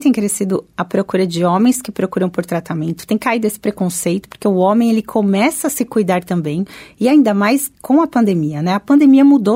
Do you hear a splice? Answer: no; 0 cuts

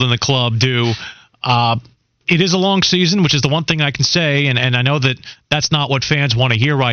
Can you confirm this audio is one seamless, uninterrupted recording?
yes; 0 cuts

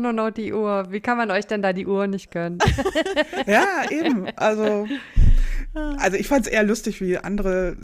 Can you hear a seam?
no; 0 cuts

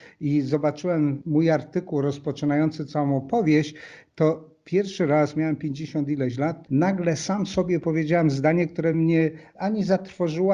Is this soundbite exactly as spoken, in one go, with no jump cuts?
yes; 0 cuts

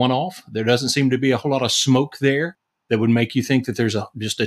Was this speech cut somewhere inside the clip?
no; 0 cuts

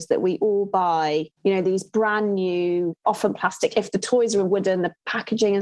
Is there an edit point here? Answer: yes; 1 cut; at 1.4 s

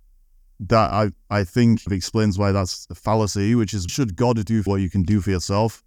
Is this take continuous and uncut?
no; 3 cuts; at 1.9 s, 3.9 s, 4.7 s

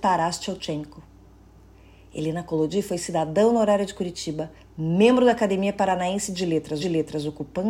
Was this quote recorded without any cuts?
no; 2 cuts; at 4.6 s, 6.8 s

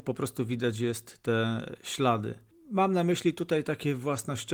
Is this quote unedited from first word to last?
yes; 0 cuts

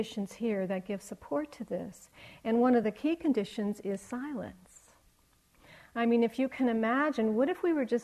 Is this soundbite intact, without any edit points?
yes; 0 cuts

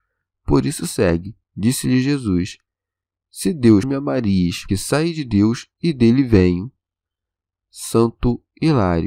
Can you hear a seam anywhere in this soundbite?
yes; 3 cuts; at 1.4 s, 3.8 s, 4.7 s

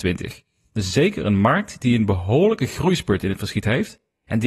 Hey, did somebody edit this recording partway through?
no; 0 cuts

